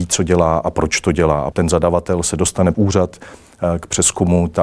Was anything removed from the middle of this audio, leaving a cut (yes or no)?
yes